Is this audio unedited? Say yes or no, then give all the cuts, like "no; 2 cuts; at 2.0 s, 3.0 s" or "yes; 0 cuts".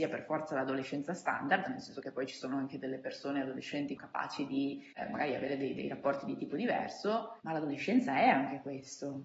no; 2 cuts; at 4.0 s, 7.4 s